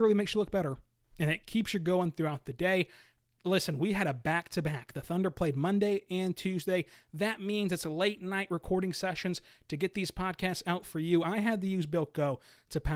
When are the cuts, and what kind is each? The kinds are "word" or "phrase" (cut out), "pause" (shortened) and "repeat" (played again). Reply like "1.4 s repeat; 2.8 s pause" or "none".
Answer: none